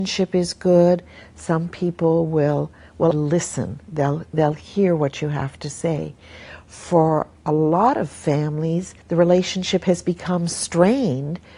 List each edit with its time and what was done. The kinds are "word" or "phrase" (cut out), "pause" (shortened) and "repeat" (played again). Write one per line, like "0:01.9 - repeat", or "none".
0:03.1 - word
0:09.0 - pause